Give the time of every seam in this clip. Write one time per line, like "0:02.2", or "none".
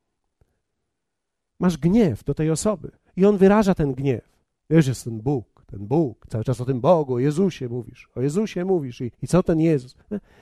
0:03.0
0:04.4
0:09.1